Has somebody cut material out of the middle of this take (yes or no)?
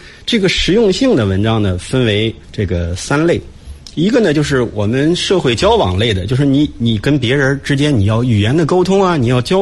yes